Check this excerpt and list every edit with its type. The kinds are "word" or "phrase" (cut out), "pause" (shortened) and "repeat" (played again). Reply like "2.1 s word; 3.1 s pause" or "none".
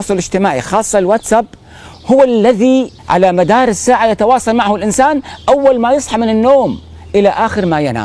3.0 s pause